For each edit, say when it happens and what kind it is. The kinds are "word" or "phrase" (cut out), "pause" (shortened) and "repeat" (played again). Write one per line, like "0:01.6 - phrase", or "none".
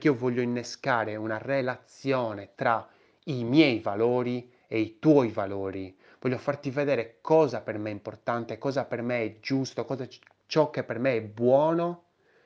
none